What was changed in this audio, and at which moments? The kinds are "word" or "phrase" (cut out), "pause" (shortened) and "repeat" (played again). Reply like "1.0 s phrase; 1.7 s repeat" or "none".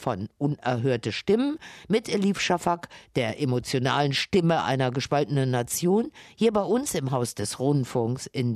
none